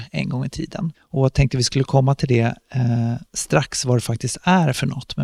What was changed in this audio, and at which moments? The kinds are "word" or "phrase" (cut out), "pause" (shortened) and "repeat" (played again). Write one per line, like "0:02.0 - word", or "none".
0:00.9 - pause